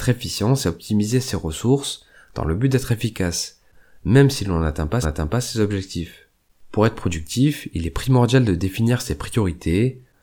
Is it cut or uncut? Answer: cut